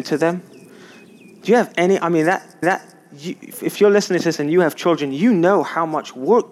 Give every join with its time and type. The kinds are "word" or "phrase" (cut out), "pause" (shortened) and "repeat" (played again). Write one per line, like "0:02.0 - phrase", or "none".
0:02.6 - repeat